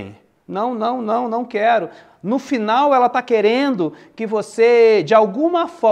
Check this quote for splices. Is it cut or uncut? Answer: uncut